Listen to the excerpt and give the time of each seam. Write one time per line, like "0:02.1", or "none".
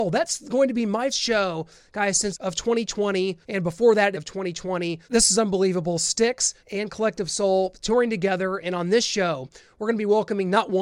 0:01.1
0:02.3
0:03.4
0:04.1
0:05.0
0:06.6